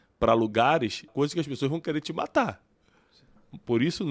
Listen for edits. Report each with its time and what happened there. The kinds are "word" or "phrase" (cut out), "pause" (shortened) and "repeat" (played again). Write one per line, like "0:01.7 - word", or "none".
0:01.1 - phrase